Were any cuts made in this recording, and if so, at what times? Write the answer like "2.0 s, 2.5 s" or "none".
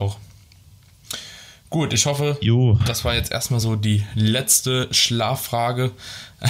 none